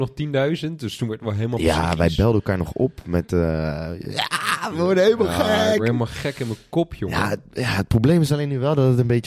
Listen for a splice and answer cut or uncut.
uncut